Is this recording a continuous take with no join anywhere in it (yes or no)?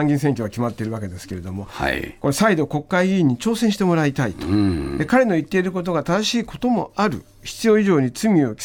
yes